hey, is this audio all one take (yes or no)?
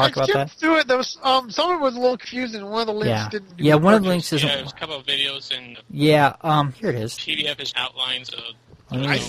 no